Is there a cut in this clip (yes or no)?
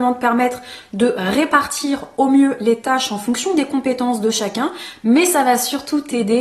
no